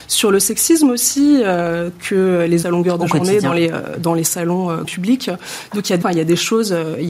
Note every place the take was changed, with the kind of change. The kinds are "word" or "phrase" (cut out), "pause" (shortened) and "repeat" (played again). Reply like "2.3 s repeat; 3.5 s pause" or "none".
2.6 s phrase; 4.8 s word; 6.0 s word

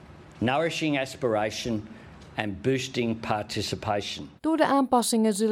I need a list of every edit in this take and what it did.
4.4 s pause

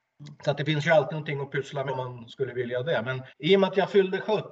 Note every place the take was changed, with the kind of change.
1.9 s word; 3.3 s pause

